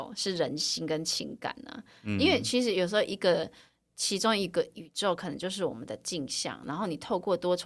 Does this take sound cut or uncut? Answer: uncut